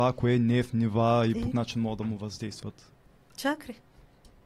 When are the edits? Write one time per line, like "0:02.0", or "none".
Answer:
0:01.5